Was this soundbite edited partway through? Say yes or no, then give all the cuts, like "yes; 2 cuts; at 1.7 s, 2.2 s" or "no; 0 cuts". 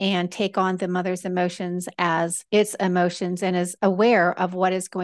yes; 1 cut; at 2.5 s